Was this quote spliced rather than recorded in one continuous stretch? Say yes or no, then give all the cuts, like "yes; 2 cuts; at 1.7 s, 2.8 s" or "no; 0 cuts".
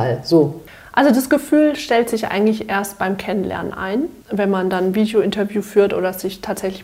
no; 0 cuts